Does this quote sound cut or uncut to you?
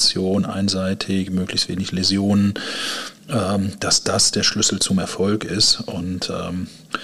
uncut